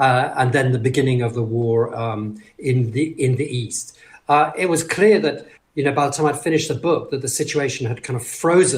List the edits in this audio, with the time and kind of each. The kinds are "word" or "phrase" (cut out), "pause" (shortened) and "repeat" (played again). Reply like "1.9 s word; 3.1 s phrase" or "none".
5.6 s pause